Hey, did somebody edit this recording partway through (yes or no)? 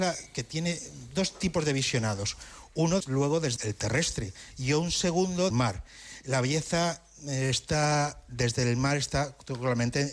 yes